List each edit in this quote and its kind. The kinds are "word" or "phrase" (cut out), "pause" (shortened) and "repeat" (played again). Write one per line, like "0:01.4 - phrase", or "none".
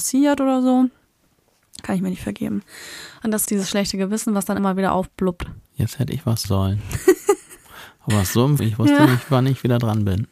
0:01.8 - word
0:03.5 - word
0:04.6 - word
0:05.6 - pause
0:06.4 - word
0:08.1 - word
0:08.6 - word